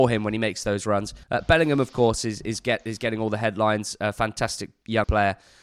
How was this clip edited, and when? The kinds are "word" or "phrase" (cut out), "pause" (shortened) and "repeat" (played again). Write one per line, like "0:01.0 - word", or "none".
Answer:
0:01.2 - pause